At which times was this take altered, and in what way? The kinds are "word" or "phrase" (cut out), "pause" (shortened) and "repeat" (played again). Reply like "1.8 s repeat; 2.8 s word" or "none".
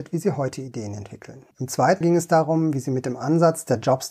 1.5 s pause; 2.0 s word